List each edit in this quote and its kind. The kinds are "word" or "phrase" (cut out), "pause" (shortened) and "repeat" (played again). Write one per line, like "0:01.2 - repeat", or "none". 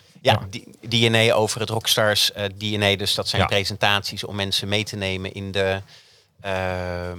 none